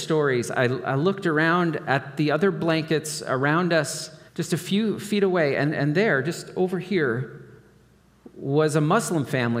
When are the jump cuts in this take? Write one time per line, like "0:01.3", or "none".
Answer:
0:04.3